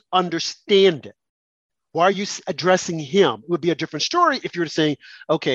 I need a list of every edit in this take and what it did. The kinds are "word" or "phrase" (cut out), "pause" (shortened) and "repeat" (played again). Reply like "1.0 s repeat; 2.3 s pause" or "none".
none